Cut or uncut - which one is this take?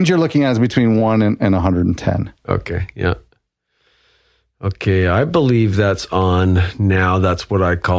uncut